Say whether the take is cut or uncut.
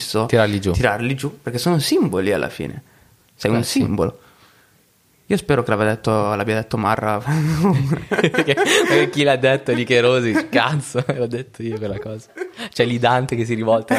uncut